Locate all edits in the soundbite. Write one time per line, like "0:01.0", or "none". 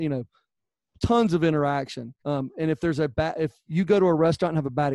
0:02.2